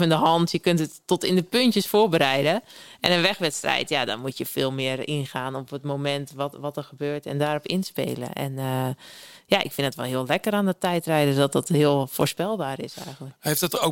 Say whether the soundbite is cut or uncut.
uncut